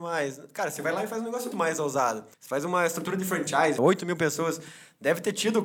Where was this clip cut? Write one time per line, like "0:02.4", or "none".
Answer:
0:01.5
0:02.3
0:03.8